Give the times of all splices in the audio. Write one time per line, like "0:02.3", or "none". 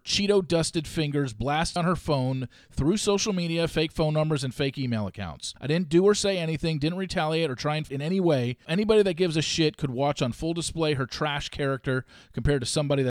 0:01.8
0:05.6
0:07.9
0:08.6